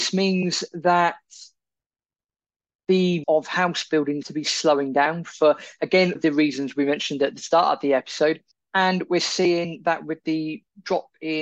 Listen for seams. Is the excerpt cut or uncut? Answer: cut